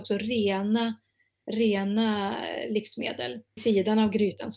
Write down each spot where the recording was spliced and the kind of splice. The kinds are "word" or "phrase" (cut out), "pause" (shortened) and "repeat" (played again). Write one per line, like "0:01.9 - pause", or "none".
0:03.6 - word